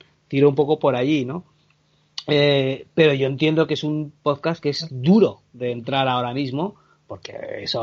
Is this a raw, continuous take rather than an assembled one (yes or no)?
yes